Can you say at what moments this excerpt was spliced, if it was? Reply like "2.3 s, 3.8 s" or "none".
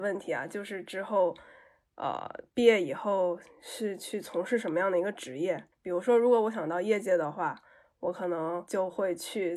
5.7 s